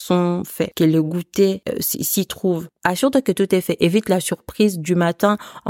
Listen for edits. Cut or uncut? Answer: uncut